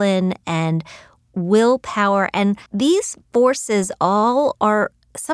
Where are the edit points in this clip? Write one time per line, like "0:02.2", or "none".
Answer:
0:02.7